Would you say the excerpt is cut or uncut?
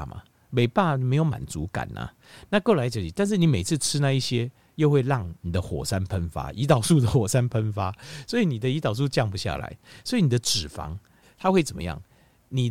uncut